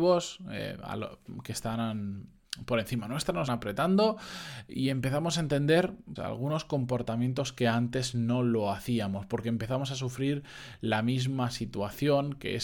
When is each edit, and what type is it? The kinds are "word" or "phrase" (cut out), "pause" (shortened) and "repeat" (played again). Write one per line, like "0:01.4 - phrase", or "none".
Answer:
0:03.5 - word
0:06.2 - word